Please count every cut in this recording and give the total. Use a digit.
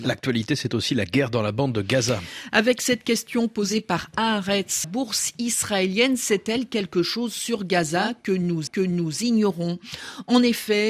2